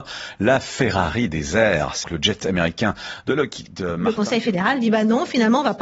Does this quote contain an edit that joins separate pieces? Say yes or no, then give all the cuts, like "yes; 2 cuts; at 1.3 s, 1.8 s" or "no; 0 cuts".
yes; 1 cut; at 2.0 s